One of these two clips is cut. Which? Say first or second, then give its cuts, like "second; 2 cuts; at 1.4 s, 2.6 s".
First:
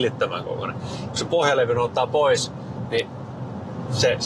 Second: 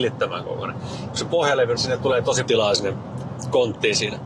second; 2 cuts; at 1.8 s, 2.4 s